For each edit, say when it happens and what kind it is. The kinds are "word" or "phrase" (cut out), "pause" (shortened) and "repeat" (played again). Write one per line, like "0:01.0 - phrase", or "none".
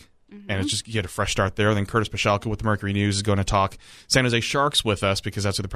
none